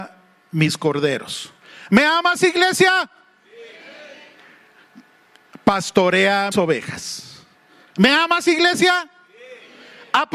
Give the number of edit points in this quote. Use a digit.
1